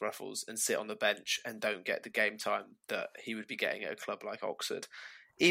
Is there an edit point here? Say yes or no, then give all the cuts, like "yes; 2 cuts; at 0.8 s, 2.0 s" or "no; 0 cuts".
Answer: no; 0 cuts